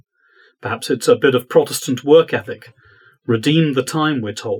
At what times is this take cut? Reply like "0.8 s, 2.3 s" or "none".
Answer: none